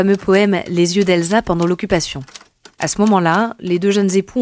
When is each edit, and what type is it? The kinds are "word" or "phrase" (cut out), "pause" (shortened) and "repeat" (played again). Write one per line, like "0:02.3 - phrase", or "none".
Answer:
0:02.7 - pause